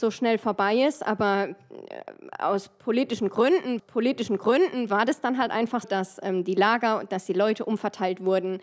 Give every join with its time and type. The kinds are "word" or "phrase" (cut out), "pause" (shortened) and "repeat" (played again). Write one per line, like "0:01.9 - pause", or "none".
0:03.8 - repeat
0:05.8 - word